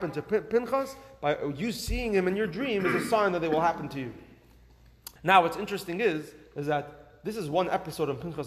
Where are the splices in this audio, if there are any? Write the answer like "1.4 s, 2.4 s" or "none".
5.2 s